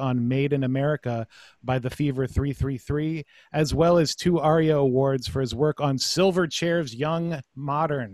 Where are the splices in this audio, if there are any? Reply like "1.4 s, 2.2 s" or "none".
none